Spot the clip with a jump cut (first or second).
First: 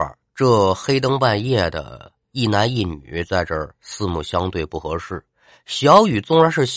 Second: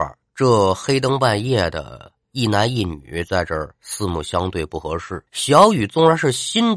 second